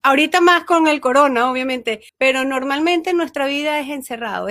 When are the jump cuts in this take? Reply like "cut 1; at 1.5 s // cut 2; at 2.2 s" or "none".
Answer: cut 1; at 2.1 s